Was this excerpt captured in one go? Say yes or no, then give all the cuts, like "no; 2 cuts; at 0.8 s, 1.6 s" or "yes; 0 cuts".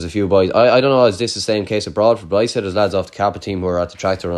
yes; 0 cuts